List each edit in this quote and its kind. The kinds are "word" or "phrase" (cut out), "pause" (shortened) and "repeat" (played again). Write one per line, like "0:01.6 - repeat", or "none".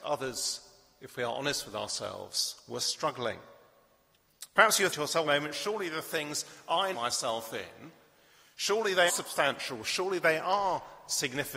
0:04.9 - word
0:05.2 - phrase
0:06.9 - word
0:09.1 - word